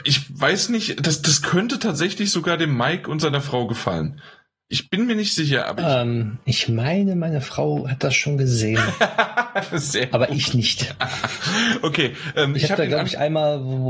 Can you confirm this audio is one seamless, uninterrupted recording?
yes; 0 cuts

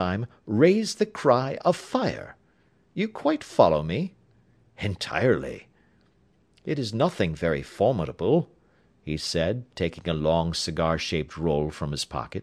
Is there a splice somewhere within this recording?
no; 0 cuts

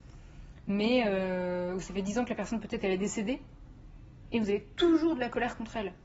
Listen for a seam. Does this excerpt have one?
no; 0 cuts

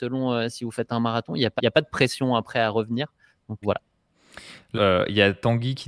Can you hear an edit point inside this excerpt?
yes; 3 cuts; at 1.6 s, 3.6 s, 4.7 s

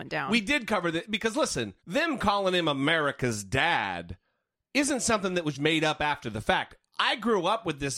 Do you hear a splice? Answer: yes; 2 cuts; at 1.8 s, 5.5 s

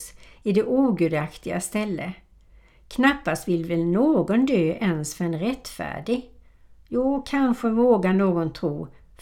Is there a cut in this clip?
no; 0 cuts

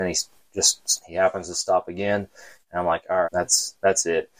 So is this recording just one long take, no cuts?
no; 1 cut; at 3.2 s

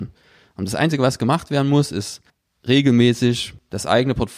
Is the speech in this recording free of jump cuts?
yes; 0 cuts

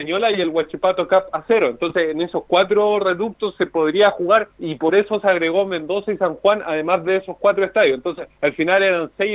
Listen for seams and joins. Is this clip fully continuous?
no; 2 cuts; at 4.5 s, 8.3 s

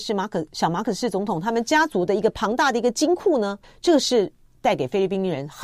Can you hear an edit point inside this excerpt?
yes; 1 cut; at 3.6 s

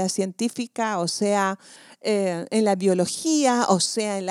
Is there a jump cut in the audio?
no; 0 cuts

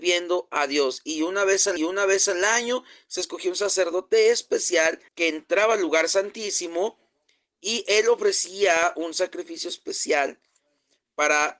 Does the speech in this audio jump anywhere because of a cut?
yes; 2 cuts; at 1.8 s, 5.1 s

